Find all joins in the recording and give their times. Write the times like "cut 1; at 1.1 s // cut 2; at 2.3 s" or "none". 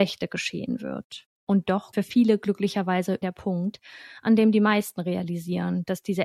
cut 1; at 1.4 s // cut 2; at 1.9 s // cut 3; at 3.2 s